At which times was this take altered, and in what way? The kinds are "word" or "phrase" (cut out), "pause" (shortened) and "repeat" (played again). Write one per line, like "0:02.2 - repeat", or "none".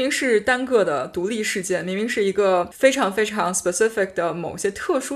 none

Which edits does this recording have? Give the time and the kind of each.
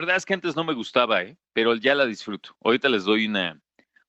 0:01.5 - pause

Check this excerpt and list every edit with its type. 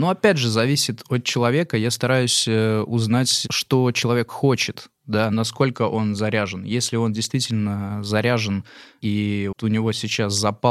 0:09.5 - word

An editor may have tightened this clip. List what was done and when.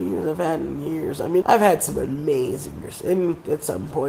0:01.4 - word
0:02.8 - word

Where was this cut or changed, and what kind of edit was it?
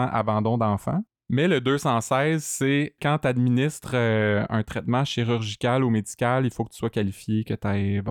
none

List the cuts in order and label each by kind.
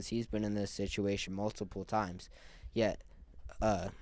0:01.3 - word

